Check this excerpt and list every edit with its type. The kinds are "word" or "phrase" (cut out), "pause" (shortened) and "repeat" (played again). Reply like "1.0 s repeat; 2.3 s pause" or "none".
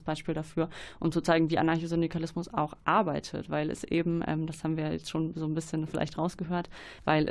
none